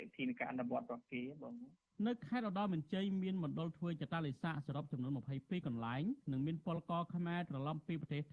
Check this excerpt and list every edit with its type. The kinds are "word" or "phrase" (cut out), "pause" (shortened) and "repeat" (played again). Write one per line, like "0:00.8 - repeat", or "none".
0:06.2 - pause